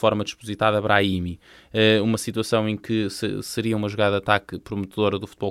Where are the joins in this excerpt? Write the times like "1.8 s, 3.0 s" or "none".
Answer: none